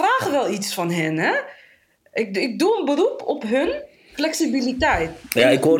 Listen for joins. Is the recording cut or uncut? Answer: uncut